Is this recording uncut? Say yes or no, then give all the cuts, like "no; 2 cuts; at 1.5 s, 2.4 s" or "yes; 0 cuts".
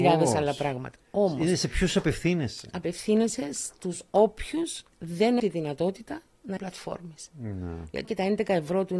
no; 3 cuts; at 5.4 s, 6.6 s, 8.0 s